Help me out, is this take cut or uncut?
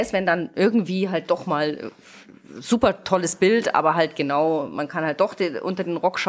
uncut